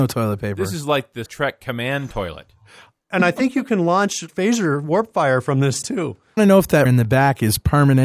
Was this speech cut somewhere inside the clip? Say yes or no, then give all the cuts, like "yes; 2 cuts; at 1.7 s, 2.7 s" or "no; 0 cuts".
yes; 5 cuts; at 1.3 s, 4.3 s, 5.8 s, 6.4 s, 6.9 s